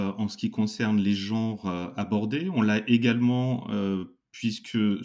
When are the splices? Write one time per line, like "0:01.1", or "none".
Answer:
none